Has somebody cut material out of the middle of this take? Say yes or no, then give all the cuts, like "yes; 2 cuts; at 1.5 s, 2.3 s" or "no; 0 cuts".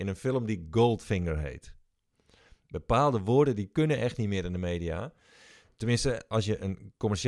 no; 0 cuts